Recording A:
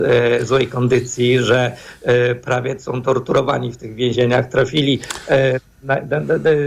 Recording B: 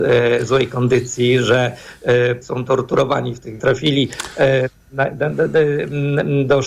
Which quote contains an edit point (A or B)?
B